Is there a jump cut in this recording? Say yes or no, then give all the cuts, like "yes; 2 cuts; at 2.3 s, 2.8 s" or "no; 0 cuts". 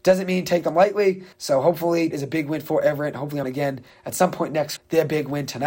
yes; 4 cuts; at 1.3 s, 2.1 s, 3.4 s, 4.8 s